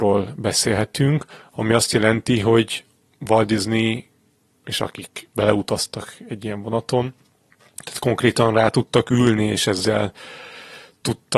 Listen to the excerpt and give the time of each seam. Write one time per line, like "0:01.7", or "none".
none